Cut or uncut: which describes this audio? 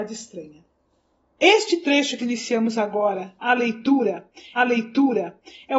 cut